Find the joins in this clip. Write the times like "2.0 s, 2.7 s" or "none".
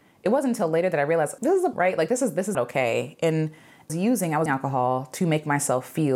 1.4 s, 1.7 s, 2.5 s, 3.9 s, 4.5 s